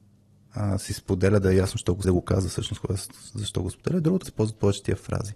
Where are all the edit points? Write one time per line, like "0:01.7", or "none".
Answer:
0:02.0
0:04.2